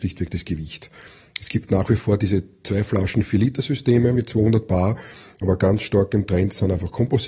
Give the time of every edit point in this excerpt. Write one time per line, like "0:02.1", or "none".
none